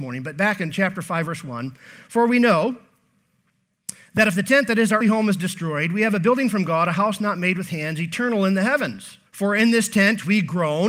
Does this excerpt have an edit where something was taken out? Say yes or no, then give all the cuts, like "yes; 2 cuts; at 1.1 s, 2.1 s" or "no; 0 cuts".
yes; 2 cuts; at 5.0 s, 9.3 s